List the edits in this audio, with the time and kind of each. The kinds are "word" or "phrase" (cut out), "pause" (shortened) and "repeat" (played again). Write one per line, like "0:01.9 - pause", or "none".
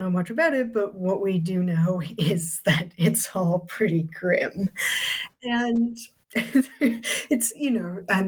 0:06.1 - pause

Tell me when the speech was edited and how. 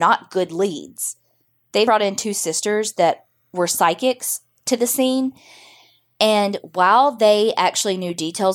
0:01.9 - word

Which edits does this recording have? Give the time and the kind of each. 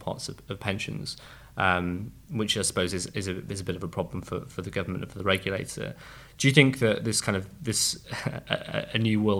none

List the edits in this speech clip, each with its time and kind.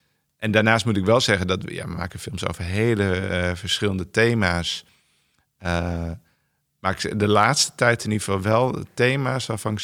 none

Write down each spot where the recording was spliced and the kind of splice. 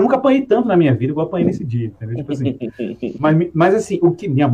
none

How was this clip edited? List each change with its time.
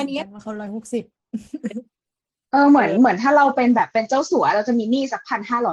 none

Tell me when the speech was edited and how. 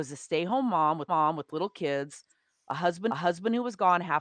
0:01.1 - repeat
0:03.1 - repeat

